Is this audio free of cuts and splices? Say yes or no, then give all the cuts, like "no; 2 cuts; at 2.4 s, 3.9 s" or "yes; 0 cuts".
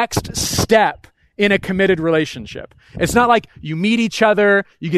yes; 0 cuts